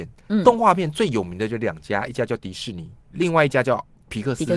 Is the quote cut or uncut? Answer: cut